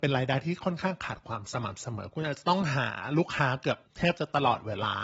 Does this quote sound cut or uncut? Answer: cut